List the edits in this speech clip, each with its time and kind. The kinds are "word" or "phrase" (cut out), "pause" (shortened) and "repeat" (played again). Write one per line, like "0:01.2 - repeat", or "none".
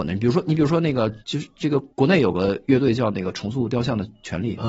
0:01.2 - pause
0:01.9 - pause